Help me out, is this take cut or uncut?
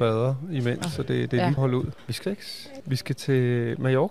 cut